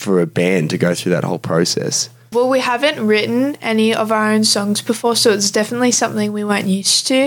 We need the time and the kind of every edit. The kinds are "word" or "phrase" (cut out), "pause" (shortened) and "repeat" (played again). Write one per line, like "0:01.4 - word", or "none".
0:02.3 - word